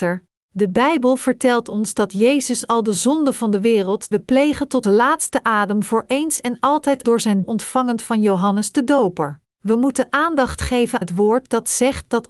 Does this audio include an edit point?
yes; 6 cuts; at 4.1 s, 4.8 s, 7.0 s, 7.4 s, 9.5 s, 11.0 s

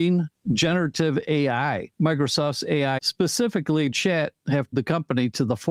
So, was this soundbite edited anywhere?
yes; 4 cuts; at 1.9 s, 3.0 s, 3.9 s, 4.7 s

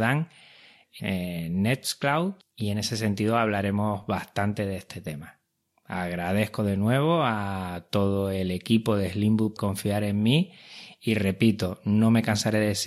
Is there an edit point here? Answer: yes; 2 cuts; at 1.0 s, 9.6 s

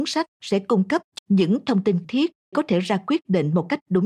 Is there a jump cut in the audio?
yes; 3 cuts; at 1.2 s, 2.0 s, 2.5 s

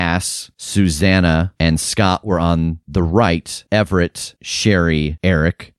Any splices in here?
no; 0 cuts

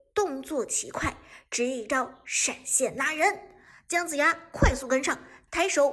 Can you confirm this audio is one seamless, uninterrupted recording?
yes; 0 cuts

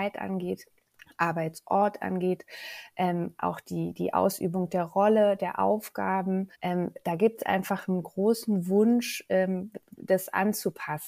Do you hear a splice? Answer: yes; 1 cut; at 6.5 s

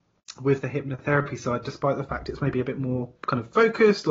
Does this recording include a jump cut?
no; 0 cuts

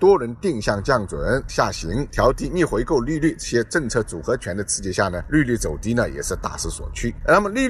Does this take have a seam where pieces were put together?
yes; 1 cut; at 1.5 s

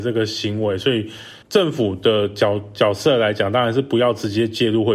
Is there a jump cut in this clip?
yes; 1 cut; at 1.4 s

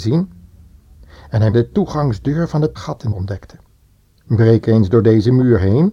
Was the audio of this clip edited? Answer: yes; 3 cuts; at 1.5 s, 2.8 s, 3.1 s

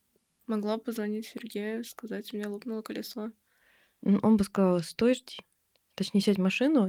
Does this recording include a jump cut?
no; 0 cuts

